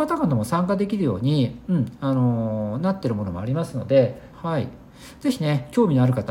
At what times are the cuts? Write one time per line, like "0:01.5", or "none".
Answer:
0:04.3